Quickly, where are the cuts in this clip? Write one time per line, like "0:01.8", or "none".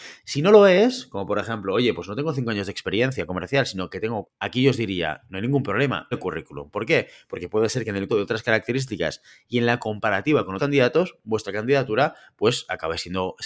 0:04.2
0:06.1
0:08.1
0:10.6